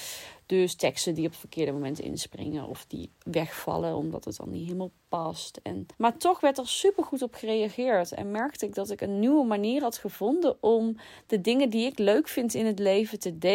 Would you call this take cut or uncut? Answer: cut